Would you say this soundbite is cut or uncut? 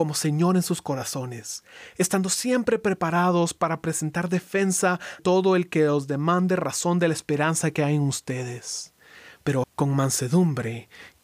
cut